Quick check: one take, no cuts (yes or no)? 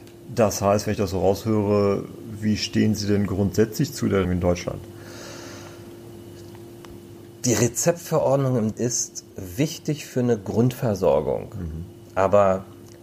no